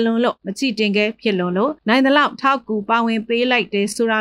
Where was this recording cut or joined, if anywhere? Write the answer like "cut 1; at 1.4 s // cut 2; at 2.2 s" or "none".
cut 1; at 1.8 s